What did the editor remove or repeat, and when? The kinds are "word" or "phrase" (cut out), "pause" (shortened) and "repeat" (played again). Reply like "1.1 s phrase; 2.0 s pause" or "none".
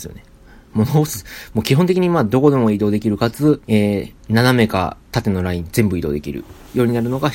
3.6 s pause; 4.2 s pause; 5.0 s pause